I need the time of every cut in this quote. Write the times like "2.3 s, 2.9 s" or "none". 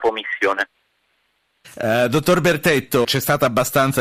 3.0 s